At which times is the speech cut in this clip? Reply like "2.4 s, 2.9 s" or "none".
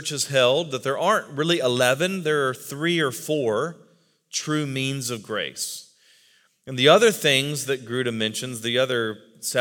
none